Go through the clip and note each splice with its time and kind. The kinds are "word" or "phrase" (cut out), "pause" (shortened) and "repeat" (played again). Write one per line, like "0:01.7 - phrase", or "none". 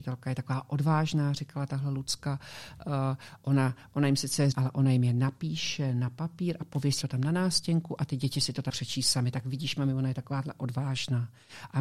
0:04.5 - phrase
0:07.0 - word
0:08.7 - word